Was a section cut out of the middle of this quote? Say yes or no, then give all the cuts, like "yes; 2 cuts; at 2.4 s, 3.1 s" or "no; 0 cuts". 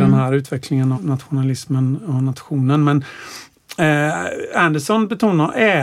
yes; 1 cut; at 0.9 s